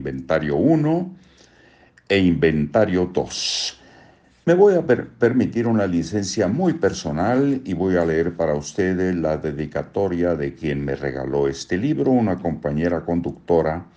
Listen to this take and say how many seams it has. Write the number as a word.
zero